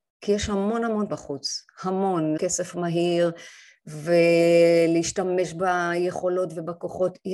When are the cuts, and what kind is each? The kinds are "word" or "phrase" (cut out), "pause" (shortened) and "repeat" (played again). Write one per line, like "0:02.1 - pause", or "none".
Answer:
0:01.1 - word
0:02.4 - word

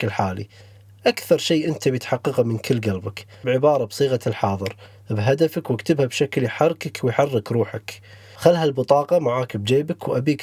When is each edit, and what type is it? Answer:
0:03.4 - word

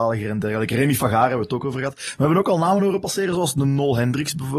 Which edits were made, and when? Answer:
none

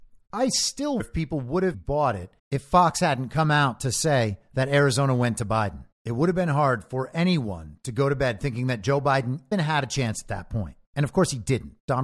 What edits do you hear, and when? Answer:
0:01.0 - word
0:01.7 - word
0:02.4 - pause
0:05.9 - pause
0:09.5 - word

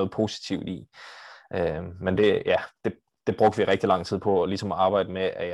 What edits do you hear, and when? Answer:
none

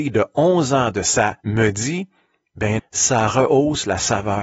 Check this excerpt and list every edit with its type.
0:01.4 - word
0:02.8 - word

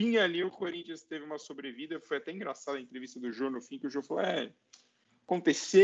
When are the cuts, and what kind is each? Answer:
none

